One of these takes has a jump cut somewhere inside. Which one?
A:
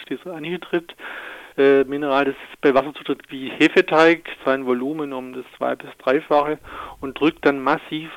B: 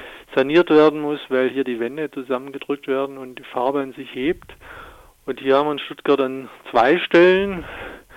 A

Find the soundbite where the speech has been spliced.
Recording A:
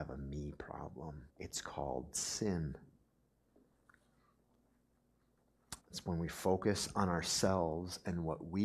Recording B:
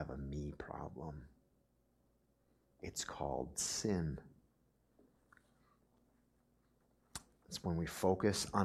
A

